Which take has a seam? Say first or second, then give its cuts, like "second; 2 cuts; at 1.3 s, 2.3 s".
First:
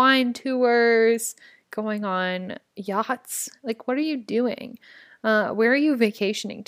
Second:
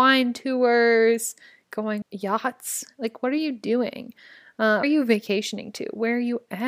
second; 2 cuts; at 2.0 s, 4.8 s